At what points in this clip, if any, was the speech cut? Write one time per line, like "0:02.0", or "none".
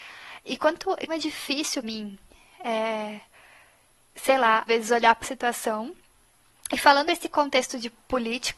0:01.1
0:01.8
0:04.7
0:05.2
0:07.0